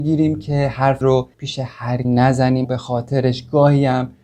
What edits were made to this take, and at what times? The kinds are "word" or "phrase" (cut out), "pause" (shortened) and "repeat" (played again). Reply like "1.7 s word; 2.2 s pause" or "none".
1.0 s word; 1.3 s pause; 2.0 s word; 2.6 s word